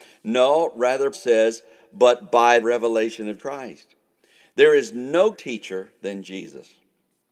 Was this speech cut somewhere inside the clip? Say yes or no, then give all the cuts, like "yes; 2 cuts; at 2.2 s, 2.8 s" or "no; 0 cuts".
yes; 4 cuts; at 1.1 s, 2.6 s, 3.4 s, 5.3 s